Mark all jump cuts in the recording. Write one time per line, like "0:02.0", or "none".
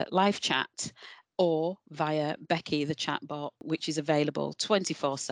none